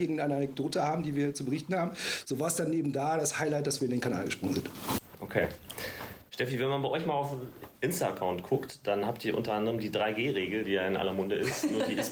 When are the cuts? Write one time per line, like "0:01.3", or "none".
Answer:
0:07.8